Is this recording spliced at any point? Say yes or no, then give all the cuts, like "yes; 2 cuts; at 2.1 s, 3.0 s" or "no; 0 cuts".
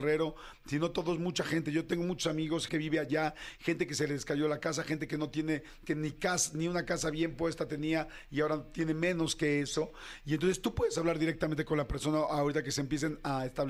yes; 1 cut; at 2.7 s